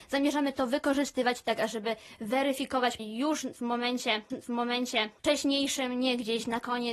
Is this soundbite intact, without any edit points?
no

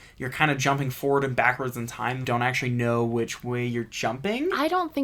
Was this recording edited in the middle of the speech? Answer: yes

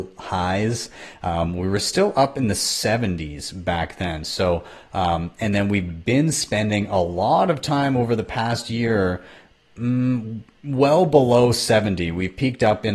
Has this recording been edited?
no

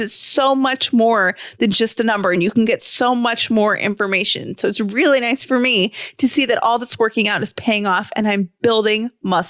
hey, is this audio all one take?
yes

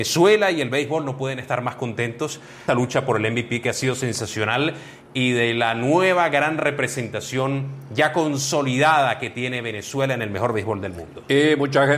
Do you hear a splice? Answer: yes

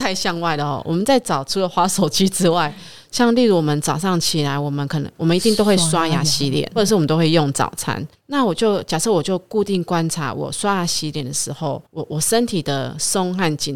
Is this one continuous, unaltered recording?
no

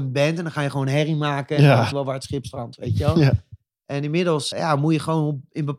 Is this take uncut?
no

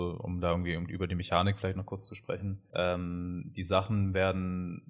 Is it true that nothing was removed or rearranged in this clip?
yes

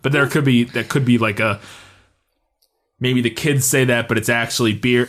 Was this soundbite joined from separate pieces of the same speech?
no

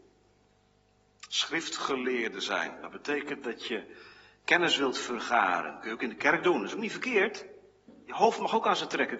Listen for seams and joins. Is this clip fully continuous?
yes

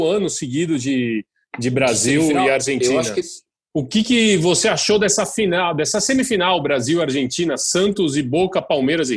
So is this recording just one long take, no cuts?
yes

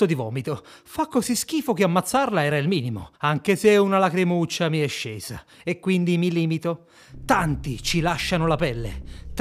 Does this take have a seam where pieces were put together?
yes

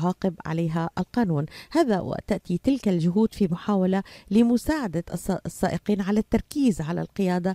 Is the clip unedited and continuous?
yes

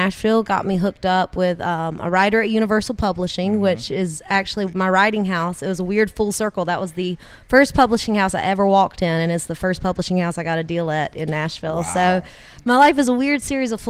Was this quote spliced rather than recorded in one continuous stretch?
no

